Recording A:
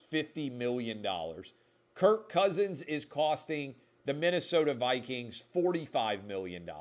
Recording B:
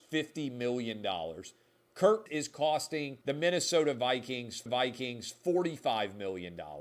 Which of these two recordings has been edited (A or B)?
B